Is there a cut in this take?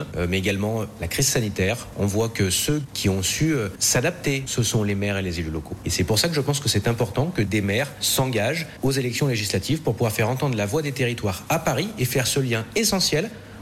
no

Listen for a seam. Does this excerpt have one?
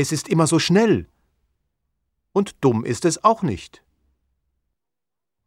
no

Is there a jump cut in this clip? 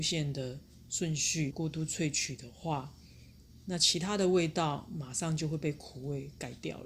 yes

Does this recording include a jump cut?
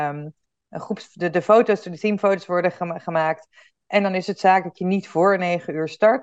no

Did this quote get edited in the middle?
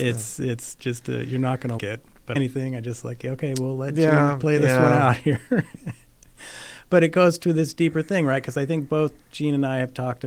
yes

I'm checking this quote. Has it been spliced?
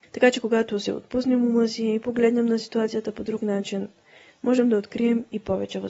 no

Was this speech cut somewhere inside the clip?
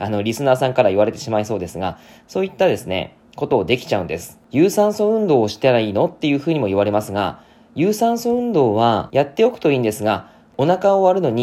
no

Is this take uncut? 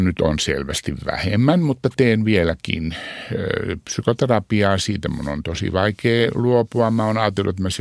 yes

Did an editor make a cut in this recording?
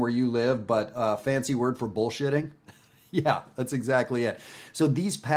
no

